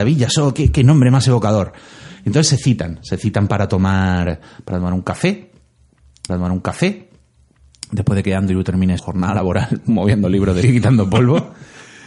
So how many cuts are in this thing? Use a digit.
3